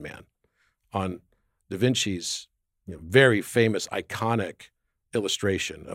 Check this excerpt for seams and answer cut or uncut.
uncut